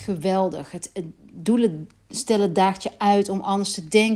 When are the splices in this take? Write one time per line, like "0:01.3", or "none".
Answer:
none